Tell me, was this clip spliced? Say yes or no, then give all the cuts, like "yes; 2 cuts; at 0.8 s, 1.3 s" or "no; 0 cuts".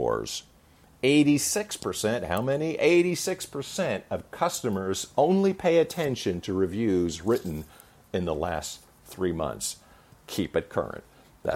no; 0 cuts